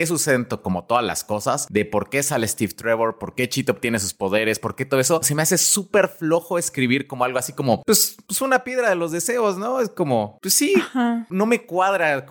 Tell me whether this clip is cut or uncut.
uncut